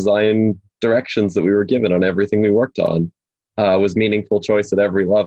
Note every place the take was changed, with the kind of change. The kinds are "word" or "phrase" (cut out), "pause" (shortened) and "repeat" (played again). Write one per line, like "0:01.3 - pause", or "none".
none